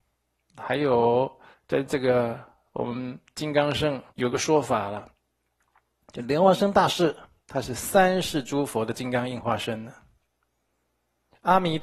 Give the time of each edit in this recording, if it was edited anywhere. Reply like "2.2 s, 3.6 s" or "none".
1.5 s, 2.7 s, 4.1 s, 7.4 s